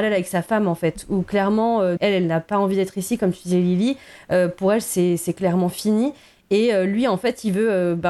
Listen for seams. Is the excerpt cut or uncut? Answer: cut